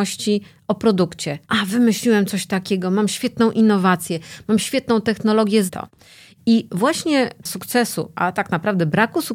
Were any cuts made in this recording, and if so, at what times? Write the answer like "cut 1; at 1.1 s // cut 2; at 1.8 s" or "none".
cut 1; at 1.4 s // cut 2; at 5.7 s // cut 3; at 7.4 s